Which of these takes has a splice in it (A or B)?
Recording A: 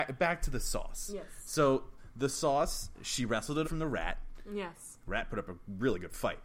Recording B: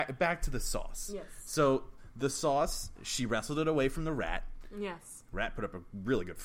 A